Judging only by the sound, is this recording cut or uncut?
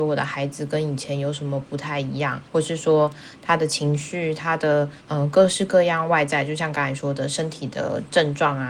cut